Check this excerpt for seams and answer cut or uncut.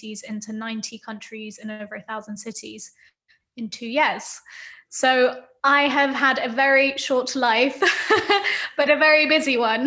uncut